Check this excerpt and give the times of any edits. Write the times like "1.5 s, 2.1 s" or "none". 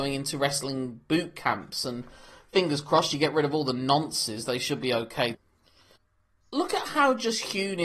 none